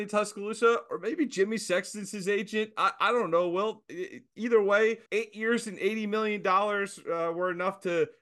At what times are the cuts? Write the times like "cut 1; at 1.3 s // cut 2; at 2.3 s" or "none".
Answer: cut 1; at 5.1 s